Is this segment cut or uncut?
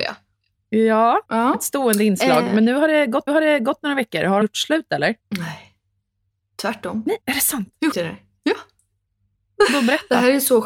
cut